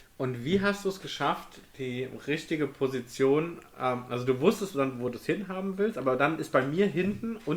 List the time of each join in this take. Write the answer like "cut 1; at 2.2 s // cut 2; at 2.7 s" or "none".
none